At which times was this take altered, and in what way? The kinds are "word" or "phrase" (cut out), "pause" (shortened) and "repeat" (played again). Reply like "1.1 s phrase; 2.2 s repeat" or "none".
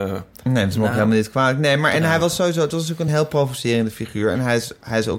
none

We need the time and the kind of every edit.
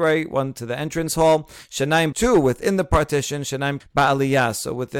2.1 s word; 3.8 s word

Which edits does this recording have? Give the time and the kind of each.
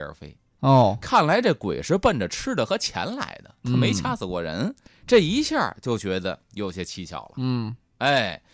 4.9 s pause

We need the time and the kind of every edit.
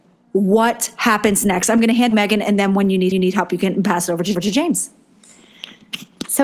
2.1 s phrase; 3.1 s repeat; 4.3 s repeat

